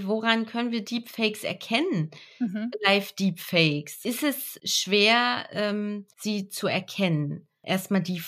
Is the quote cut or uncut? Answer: cut